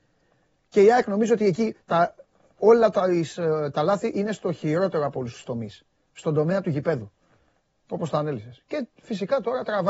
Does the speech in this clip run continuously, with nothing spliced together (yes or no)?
yes